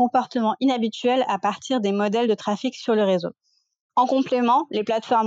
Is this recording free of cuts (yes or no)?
yes